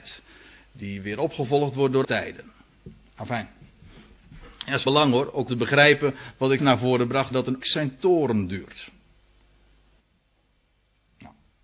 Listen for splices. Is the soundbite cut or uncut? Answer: cut